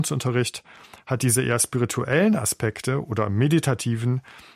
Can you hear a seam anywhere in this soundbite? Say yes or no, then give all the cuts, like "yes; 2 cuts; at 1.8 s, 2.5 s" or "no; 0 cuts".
no; 0 cuts